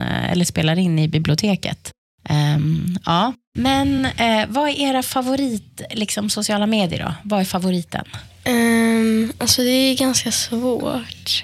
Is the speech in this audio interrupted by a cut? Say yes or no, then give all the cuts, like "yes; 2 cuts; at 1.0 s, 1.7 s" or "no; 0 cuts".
no; 0 cuts